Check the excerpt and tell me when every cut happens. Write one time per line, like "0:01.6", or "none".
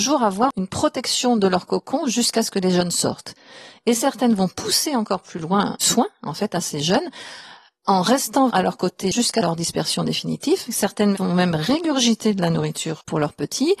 0:08.5